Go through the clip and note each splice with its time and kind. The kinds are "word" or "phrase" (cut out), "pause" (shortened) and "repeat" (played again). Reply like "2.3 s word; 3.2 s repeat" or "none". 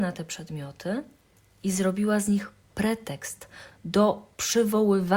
none